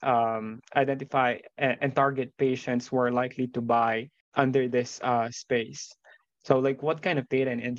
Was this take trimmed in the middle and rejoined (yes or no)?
yes